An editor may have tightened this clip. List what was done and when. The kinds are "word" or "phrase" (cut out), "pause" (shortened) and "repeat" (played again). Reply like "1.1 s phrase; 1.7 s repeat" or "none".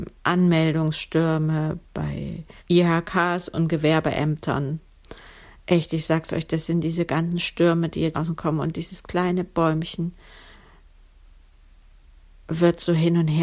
2.6 s pause; 8.1 s word